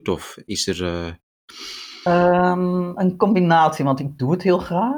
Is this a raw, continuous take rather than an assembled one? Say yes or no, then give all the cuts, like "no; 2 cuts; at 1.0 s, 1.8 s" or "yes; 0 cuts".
yes; 0 cuts